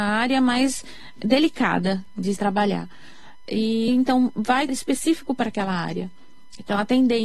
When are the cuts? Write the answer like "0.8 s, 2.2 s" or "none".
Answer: 2.4 s, 3.9 s, 4.7 s